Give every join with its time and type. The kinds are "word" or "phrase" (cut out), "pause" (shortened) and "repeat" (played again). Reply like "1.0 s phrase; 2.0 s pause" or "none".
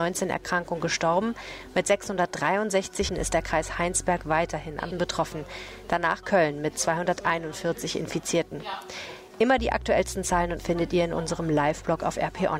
3.1 s word; 4.9 s word; 6.2 s word; 10.6 s word